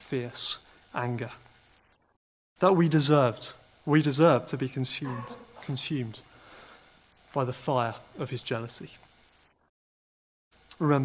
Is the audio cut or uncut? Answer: uncut